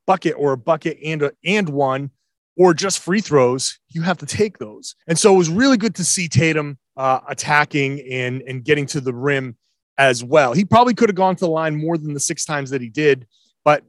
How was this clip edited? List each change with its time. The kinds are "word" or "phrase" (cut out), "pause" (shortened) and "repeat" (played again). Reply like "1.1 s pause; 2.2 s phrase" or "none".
5.0 s pause; 6.9 s pause